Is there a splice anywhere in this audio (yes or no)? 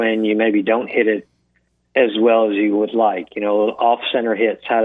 no